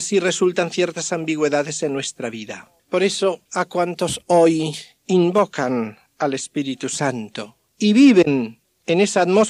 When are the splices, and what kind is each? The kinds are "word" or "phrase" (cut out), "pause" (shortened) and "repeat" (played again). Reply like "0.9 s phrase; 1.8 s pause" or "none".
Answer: 2.8 s pause; 3.5 s pause; 7.7 s pause